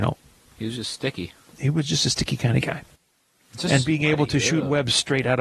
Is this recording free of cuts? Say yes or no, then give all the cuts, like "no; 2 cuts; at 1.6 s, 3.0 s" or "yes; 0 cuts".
yes; 0 cuts